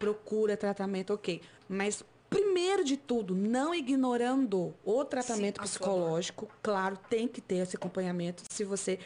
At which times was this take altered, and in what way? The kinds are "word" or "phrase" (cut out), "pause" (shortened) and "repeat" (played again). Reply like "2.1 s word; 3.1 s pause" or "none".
1.6 s pause